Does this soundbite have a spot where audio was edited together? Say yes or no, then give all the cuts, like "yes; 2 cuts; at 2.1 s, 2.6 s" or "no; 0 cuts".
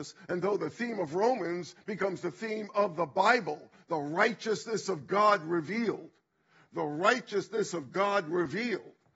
no; 0 cuts